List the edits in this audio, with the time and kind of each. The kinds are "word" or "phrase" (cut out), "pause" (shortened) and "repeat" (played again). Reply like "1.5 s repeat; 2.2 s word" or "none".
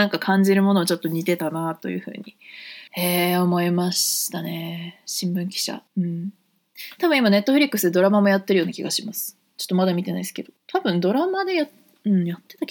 2.9 s pause; 5.9 s pause; 10.6 s pause